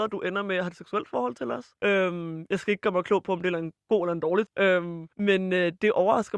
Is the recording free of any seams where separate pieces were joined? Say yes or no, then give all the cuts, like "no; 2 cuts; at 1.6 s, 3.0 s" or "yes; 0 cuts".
no; 3 cuts; at 1.7 s, 4.5 s, 5.1 s